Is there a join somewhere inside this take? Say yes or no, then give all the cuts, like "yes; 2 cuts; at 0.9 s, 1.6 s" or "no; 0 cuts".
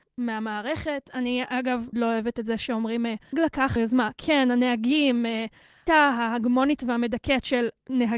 yes; 4 cuts; at 1.9 s, 3.3 s, 3.8 s, 5.9 s